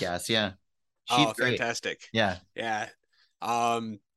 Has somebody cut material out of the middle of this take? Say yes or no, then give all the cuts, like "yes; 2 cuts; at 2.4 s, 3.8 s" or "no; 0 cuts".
no; 0 cuts